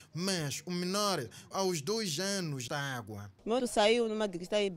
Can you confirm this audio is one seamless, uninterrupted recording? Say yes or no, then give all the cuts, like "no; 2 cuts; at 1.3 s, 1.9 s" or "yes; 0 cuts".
no; 3 cuts; at 1.5 s, 2.7 s, 3.6 s